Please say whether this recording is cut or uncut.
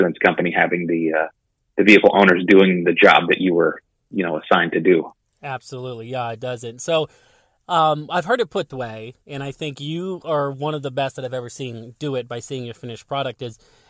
cut